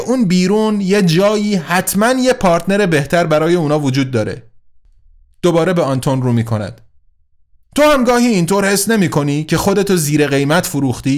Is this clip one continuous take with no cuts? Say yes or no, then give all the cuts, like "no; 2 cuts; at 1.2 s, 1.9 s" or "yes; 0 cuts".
yes; 0 cuts